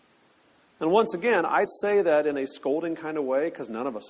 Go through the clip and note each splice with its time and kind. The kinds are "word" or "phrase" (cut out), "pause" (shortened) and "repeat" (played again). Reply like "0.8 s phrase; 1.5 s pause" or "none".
1.7 s word